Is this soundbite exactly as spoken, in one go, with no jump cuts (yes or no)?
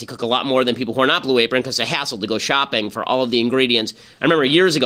yes